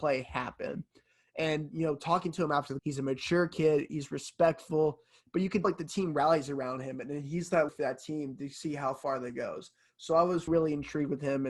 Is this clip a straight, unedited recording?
no; 4 cuts; at 2.8 s, 5.6 s, 7.7 s, 10.5 s

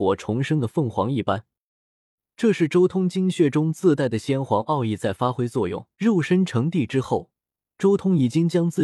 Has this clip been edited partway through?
yes; 1 cut; at 5.9 s

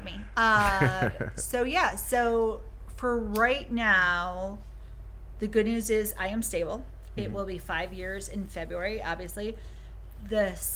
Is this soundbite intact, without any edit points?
yes; 0 cuts

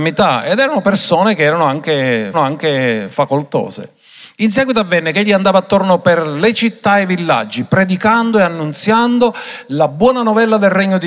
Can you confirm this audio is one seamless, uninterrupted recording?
no; 1 cut; at 2.3 s

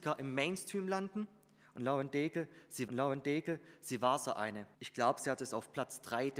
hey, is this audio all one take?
no; 2 cuts; at 2.9 s, 4.7 s

